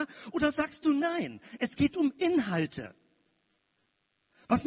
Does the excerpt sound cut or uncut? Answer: uncut